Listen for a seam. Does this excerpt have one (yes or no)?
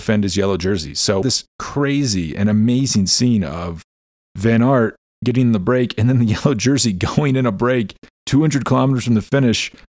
yes